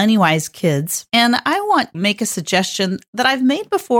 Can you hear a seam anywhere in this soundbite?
yes; 2 cuts; at 1.1 s, 1.9 s

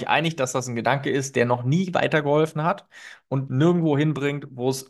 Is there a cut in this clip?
yes; 1 cut; at 3.5 s

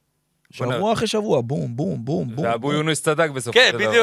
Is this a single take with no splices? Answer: yes; 0 cuts

